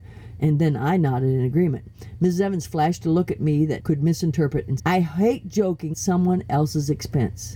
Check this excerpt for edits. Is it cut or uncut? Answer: cut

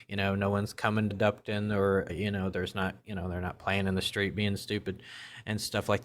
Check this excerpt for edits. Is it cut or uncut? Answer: cut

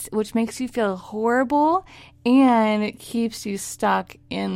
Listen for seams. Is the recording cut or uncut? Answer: uncut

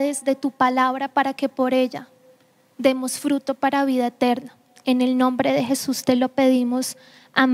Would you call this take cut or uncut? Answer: uncut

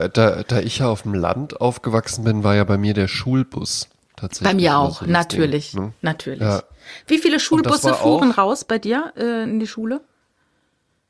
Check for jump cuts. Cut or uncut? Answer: uncut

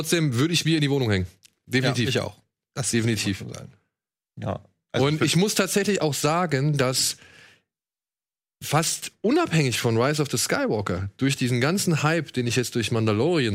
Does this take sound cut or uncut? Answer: uncut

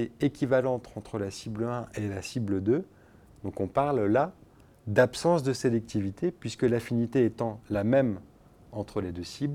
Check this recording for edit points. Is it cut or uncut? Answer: uncut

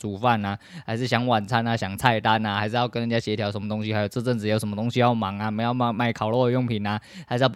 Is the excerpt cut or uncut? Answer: uncut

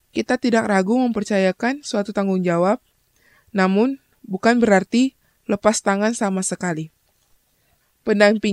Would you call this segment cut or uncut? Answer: uncut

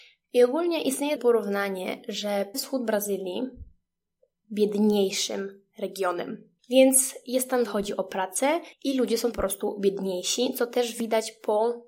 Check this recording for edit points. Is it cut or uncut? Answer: cut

